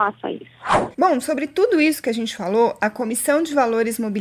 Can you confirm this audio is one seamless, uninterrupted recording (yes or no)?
no